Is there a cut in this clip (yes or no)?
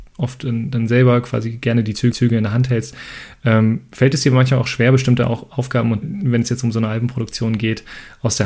yes